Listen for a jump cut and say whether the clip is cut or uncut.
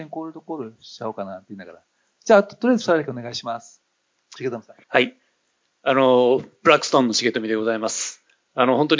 cut